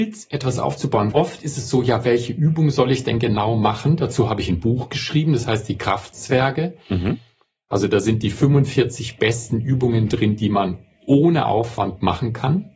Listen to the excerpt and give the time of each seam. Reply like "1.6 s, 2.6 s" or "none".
1.1 s